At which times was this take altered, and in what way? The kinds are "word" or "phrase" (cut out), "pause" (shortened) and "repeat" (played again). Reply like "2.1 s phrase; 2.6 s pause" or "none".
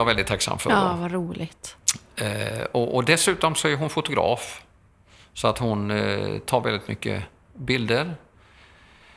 none